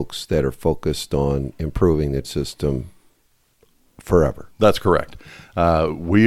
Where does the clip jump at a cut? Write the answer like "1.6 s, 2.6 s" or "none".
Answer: 2.2 s